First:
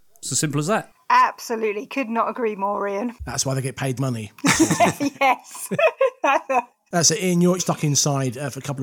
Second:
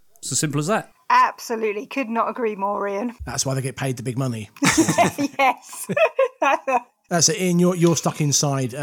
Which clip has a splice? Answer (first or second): first